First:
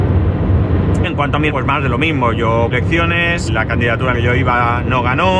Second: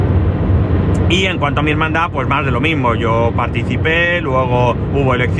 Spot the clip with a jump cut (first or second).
first